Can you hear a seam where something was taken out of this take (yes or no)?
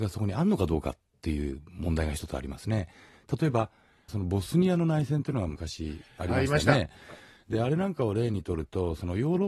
no